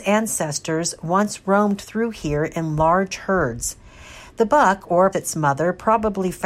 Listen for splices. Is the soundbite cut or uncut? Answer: cut